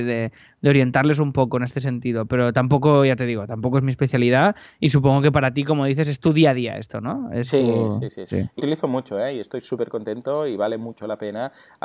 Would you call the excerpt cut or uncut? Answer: cut